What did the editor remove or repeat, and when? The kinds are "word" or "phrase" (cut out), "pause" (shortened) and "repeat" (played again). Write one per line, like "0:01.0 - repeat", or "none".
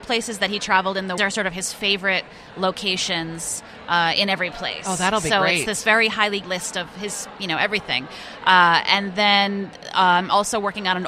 0:01.2 - phrase
0:06.4 - word

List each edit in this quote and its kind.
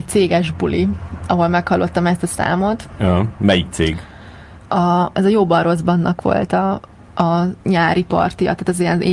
0:07.6 - pause

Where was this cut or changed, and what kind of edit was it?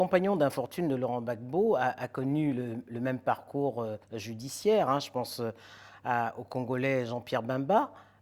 0:04.0 - pause

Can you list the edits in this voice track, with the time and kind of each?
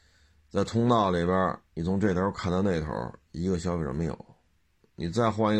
none

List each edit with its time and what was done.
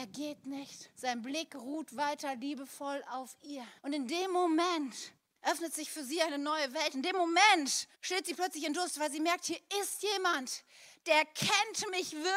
0:00.9 - pause
0:03.8 - pause
0:05.3 - pause
0:07.9 - pause

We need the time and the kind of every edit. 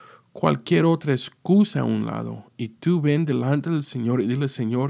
none

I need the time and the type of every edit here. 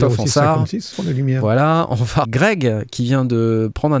0:00.9 - word
0:02.2 - word

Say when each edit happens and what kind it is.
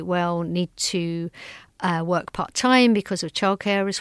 none

